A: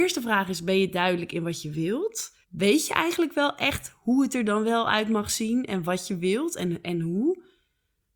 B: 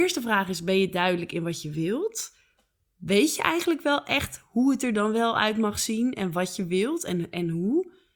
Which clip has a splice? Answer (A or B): A